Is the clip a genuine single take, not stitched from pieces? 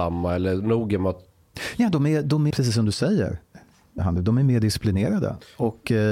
no; 2 cuts; at 2.5 s, 4.0 s

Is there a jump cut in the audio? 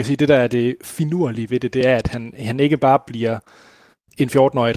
no; 0 cuts

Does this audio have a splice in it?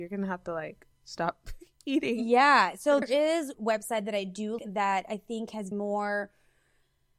yes; 4 cuts; at 3.0 s, 3.5 s, 4.6 s, 5.7 s

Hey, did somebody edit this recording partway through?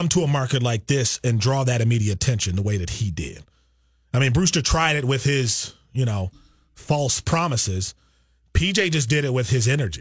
no; 0 cuts

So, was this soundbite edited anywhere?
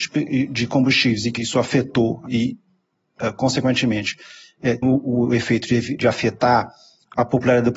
yes; 4 cuts; at 1.4 s, 2.3 s, 4.8 s, 6.0 s

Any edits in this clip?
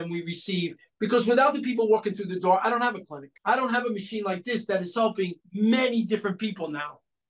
yes; 2 cuts; at 3.4 s, 5.4 s

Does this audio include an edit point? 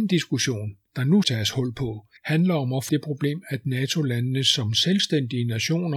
yes; 3 cuts; at 1.2 s, 2.2 s, 2.9 s

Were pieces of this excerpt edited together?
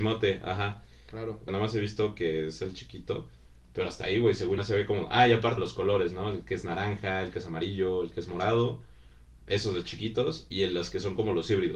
yes; 3 cuts; at 1.5 s, 4.6 s, 5.6 s

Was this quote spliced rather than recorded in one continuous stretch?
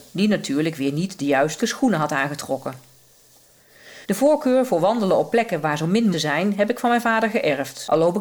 yes; 3 cuts; at 1.6 s, 4.0 s, 6.1 s

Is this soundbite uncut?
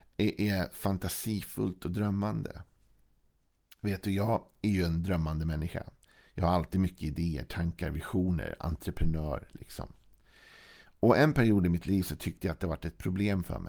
yes; 0 cuts

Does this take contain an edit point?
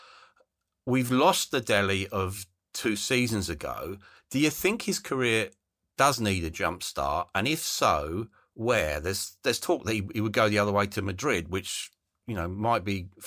no; 0 cuts

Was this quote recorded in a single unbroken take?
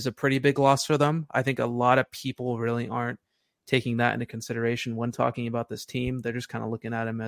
yes; 0 cuts

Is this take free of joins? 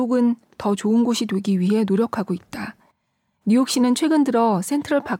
yes; 0 cuts

